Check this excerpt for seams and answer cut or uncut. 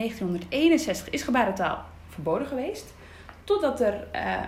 uncut